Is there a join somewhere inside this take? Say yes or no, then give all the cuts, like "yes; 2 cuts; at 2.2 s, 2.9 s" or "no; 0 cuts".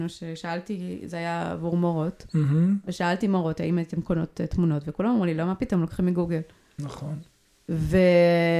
no; 0 cuts